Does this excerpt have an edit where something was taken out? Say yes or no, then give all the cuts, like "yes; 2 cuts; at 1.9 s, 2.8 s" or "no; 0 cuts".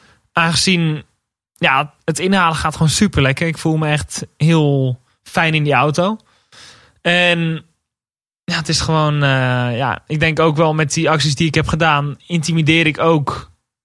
no; 0 cuts